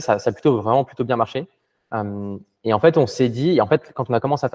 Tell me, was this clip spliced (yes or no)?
no